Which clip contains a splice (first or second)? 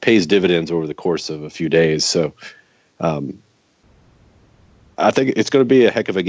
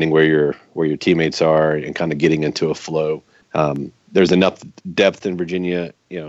second